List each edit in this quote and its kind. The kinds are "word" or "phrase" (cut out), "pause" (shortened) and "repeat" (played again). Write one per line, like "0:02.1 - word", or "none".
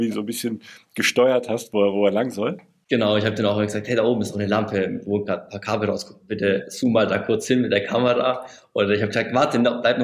none